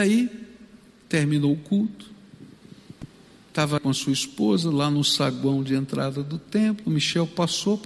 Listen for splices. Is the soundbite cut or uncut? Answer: cut